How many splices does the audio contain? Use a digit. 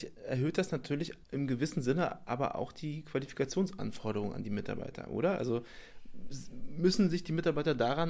1